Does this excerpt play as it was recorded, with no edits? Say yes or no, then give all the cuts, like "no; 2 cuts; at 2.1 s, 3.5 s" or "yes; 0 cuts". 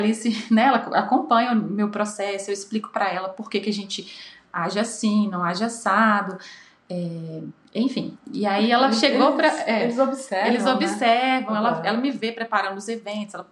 yes; 0 cuts